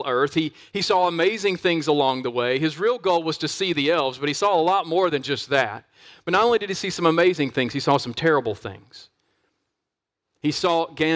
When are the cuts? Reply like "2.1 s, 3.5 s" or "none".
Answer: none